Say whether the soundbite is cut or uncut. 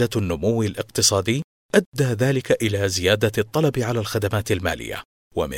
uncut